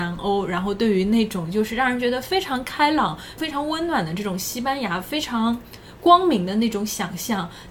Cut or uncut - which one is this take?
cut